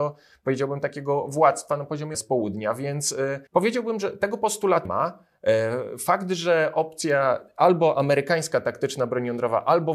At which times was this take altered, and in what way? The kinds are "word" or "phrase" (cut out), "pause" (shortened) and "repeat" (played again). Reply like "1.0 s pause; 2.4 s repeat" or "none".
2.1 s phrase; 3.5 s pause; 4.8 s word